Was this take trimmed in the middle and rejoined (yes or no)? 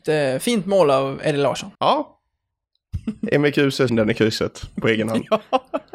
yes